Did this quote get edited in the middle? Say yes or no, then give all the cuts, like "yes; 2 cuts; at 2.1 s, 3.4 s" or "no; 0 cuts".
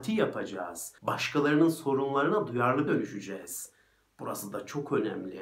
yes; 2 cuts; at 1.0 s, 2.9 s